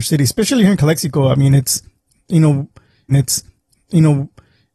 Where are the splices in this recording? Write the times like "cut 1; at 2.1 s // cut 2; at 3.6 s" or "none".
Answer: cut 1; at 3.1 s